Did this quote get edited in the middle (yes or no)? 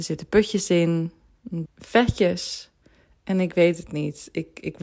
yes